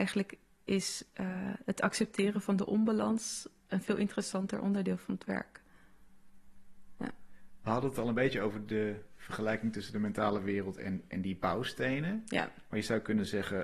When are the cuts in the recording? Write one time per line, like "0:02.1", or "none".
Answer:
none